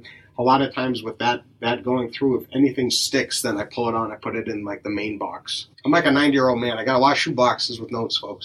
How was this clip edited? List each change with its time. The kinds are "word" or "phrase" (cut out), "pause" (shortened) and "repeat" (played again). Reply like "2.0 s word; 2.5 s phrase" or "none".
5.7 s pause